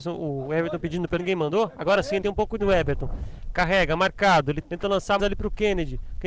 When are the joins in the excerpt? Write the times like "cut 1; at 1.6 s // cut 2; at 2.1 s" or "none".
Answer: cut 1; at 1.2 s // cut 2; at 2.2 s // cut 3; at 2.6 s // cut 4; at 4.6 s // cut 5; at 5.2 s